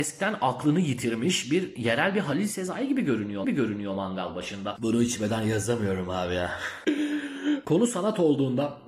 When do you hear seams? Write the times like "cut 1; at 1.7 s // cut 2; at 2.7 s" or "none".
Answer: cut 1; at 3.4 s